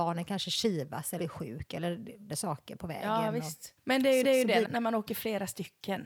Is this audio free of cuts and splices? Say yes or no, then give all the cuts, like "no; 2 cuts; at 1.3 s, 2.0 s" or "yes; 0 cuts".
no; 5 cuts; at 1.2 s, 2.3 s, 3.8 s, 4.2 s, 4.6 s